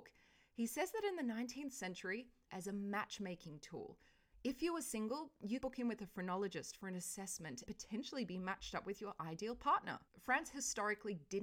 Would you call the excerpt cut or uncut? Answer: cut